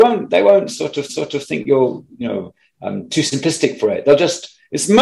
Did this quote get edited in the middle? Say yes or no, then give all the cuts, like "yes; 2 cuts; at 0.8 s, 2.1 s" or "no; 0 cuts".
yes; 1 cut; at 1.1 s